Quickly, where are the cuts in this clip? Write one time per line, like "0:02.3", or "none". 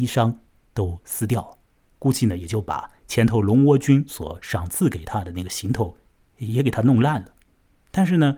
none